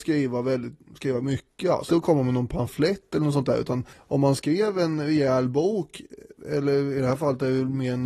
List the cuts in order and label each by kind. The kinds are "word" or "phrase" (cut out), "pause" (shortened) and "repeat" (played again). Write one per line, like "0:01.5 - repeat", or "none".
0:01.9 - word
0:03.9 - pause